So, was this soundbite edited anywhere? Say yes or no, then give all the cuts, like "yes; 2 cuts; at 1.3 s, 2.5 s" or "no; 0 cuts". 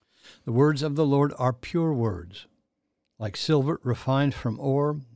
no; 0 cuts